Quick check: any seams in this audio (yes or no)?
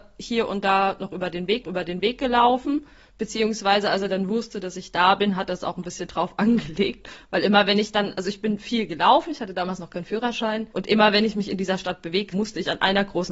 yes